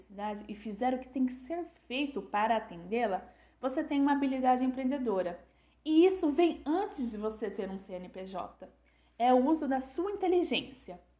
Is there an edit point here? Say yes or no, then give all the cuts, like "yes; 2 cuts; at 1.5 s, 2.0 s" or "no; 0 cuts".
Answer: no; 0 cuts